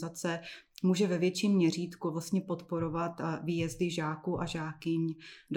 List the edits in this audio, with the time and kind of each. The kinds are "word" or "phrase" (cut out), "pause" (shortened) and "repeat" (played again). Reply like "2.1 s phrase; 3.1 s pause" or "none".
none